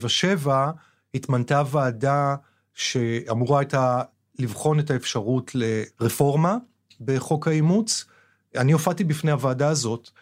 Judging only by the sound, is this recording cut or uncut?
uncut